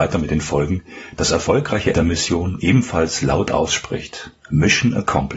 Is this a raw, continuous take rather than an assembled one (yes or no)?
no